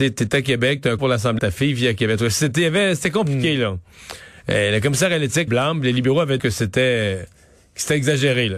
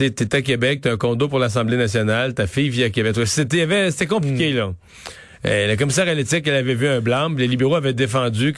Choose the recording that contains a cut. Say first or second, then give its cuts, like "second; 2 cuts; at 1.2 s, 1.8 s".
first; 4 cuts; at 1.0 s, 1.4 s, 5.5 s, 6.4 s